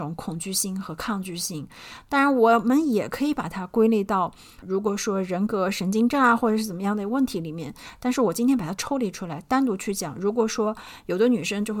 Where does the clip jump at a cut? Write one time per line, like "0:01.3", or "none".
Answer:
0:04.6

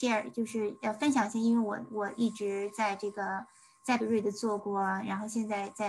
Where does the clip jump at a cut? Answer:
0:04.0

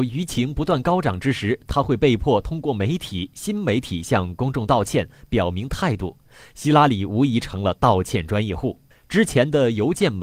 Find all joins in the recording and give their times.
0:08.9

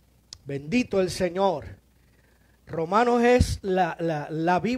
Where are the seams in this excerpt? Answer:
none

